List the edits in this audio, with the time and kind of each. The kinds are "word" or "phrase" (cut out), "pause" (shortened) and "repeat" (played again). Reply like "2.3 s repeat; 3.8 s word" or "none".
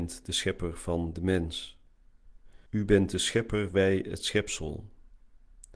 2.7 s pause

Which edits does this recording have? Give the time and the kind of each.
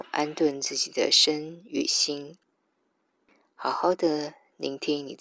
none

